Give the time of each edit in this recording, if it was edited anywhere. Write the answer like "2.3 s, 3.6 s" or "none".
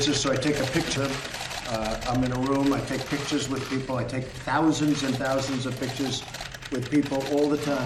1.0 s